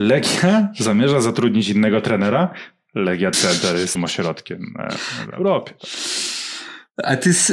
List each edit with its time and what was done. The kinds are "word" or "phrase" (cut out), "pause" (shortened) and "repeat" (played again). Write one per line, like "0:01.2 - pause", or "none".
0:03.3 - word
0:03.9 - word